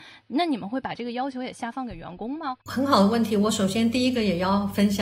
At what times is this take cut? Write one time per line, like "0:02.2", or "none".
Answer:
0:02.6